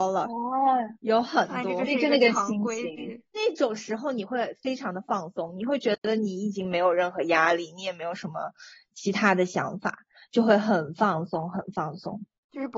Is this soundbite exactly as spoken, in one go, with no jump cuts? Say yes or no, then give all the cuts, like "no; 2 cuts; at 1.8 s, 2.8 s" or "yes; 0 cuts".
yes; 0 cuts